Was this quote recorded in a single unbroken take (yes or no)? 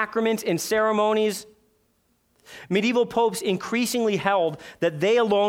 yes